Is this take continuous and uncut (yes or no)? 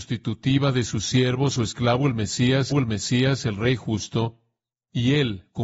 no